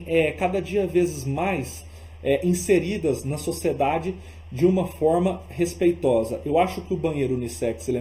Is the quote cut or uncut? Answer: uncut